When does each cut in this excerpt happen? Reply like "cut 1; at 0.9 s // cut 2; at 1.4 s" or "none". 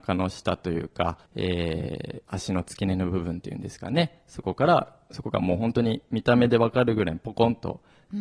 cut 1; at 1.2 s